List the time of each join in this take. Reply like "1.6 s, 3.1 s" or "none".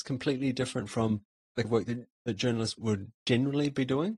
1.6 s, 2.8 s

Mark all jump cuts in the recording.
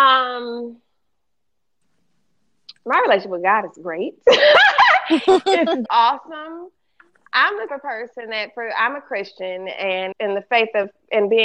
5.9 s, 7.7 s, 10.1 s

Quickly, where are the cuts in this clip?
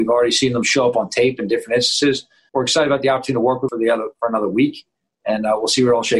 2.5 s, 3.7 s

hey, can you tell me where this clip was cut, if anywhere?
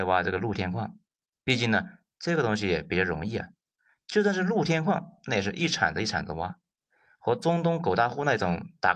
none

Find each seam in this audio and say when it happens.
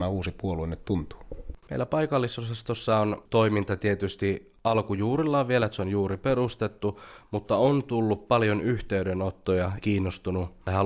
9.8 s

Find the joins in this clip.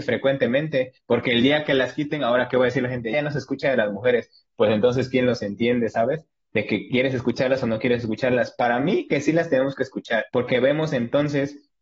3.1 s, 10.3 s

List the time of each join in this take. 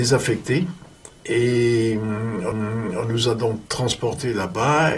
1.2 s, 2.5 s, 3.7 s

